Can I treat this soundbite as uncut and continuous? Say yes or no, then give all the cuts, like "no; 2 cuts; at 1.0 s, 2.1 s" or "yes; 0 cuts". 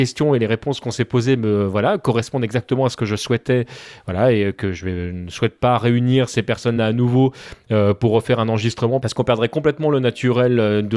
yes; 0 cuts